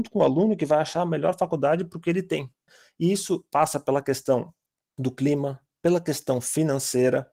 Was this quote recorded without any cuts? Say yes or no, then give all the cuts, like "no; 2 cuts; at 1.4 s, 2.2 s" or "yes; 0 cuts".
yes; 0 cuts